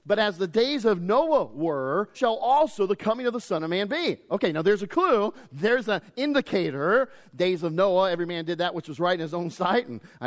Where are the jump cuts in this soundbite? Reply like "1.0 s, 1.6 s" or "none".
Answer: 2.1 s